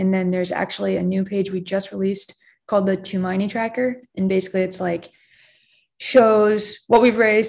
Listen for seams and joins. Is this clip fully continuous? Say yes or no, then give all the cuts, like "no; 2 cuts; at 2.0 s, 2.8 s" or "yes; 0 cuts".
yes; 0 cuts